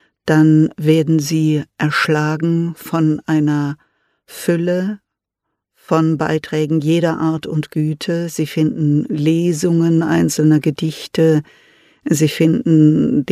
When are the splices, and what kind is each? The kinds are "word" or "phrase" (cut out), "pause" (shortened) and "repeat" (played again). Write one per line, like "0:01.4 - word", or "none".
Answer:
none